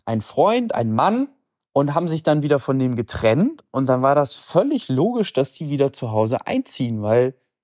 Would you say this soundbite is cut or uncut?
uncut